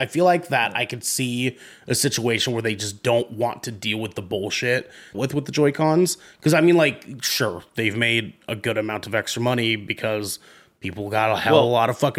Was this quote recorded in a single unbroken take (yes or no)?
no